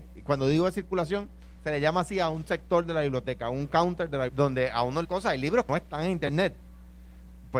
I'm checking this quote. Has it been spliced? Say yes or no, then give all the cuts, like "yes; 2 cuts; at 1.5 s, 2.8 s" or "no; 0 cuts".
yes; 3 cuts; at 4.3 s, 5.0 s, 5.7 s